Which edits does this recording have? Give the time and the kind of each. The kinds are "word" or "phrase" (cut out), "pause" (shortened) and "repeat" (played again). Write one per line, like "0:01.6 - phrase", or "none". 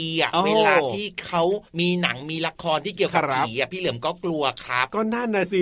0:01.7 - pause